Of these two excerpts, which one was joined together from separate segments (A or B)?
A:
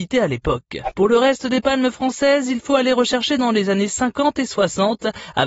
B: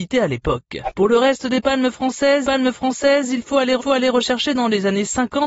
B